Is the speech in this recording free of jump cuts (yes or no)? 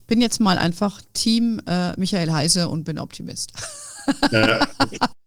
yes